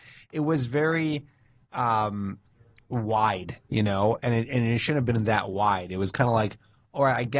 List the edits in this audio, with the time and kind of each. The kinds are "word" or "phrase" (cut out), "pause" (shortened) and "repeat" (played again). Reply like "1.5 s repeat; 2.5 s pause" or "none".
3.6 s pause